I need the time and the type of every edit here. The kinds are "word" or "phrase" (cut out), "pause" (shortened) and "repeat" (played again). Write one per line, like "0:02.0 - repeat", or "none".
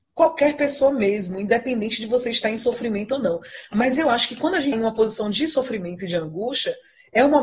0:04.7 - word